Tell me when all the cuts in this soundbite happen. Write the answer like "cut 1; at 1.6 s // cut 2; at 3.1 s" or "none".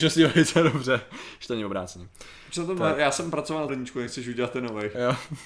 cut 1; at 3.7 s